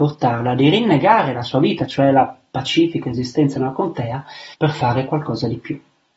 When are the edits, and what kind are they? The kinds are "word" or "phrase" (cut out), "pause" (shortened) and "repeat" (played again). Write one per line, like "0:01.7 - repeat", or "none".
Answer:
0:04.5 - pause

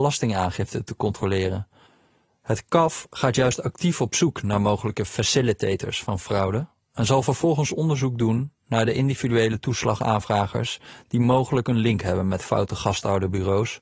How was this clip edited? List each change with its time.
none

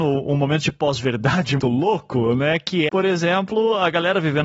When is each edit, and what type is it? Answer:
0:01.6 - word
0:02.9 - word

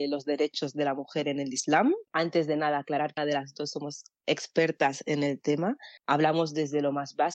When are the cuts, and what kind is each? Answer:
0:02.1 - pause
0:03.2 - word
0:06.0 - pause

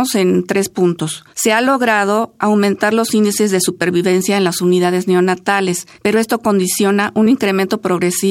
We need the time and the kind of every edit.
0:01.3 - pause
0:05.9 - pause

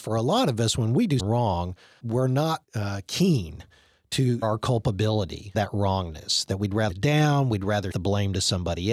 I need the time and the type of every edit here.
0:01.2 - word
0:02.0 - word
0:02.6 - word
0:04.4 - word
0:05.5 - word
0:06.9 - word
0:07.9 - word

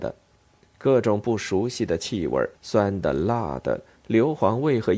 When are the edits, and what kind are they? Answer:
0:02.6 - pause

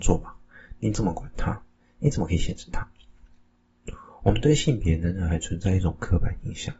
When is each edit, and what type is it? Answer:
none

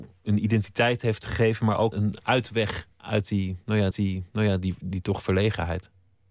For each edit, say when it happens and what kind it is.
0:01.9 - word
0:02.9 - pause
0:03.9 - repeat

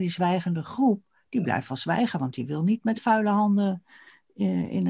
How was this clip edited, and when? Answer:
none

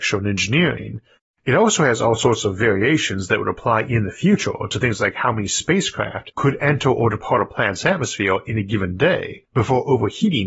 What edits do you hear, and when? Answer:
none

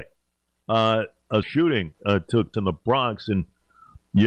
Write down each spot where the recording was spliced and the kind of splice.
0:01.4 - word
0:02.5 - word

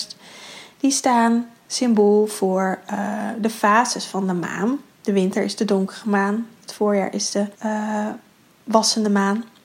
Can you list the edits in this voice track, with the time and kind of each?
0:04.9 - pause
0:07.5 - pause

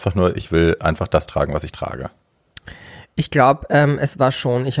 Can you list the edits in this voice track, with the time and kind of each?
none

